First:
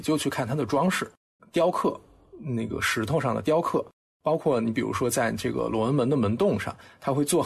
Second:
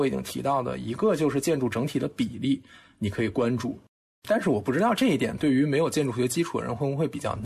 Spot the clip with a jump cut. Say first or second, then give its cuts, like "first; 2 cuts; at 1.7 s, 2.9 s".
first; 1 cut; at 1.4 s